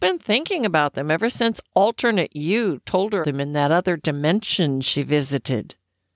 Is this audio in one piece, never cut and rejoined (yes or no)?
no